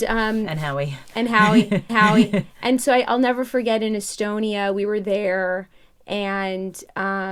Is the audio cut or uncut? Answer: cut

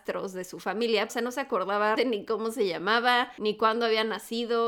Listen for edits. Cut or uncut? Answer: cut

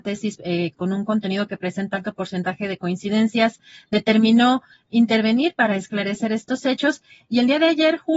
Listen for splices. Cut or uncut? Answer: uncut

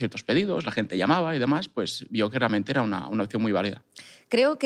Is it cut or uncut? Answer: uncut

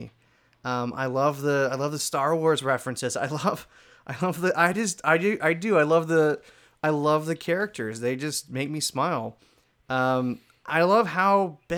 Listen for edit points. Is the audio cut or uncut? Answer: uncut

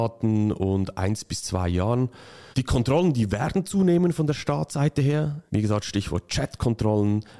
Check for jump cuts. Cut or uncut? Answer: cut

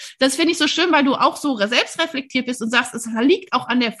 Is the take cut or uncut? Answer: uncut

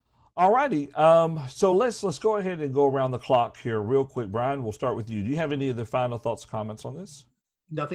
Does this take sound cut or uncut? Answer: uncut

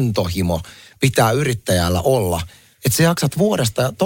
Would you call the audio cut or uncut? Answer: uncut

